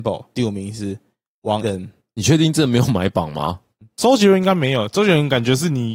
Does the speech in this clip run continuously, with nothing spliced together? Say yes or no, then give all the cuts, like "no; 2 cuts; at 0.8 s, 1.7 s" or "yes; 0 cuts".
no; 1 cut; at 1.6 s